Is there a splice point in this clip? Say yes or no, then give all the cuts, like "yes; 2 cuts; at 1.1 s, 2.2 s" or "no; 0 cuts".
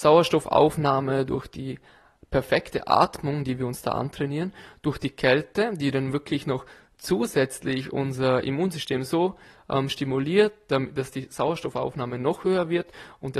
no; 0 cuts